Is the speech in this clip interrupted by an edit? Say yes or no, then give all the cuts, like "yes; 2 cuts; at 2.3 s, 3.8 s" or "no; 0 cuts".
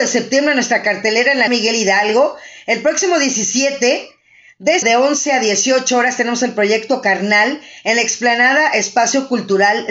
yes; 2 cuts; at 1.5 s, 4.8 s